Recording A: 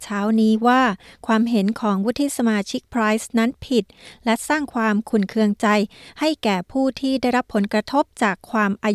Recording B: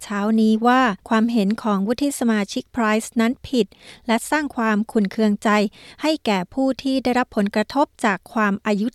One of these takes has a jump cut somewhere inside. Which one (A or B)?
B